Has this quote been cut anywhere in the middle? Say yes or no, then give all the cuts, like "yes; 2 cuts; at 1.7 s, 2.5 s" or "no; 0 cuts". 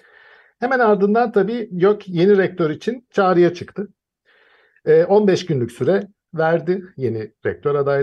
no; 0 cuts